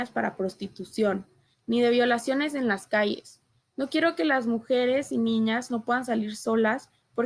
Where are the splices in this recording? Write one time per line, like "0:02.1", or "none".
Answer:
none